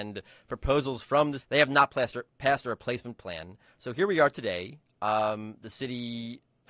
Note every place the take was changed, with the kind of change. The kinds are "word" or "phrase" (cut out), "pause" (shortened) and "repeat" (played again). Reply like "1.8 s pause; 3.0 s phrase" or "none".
1.4 s word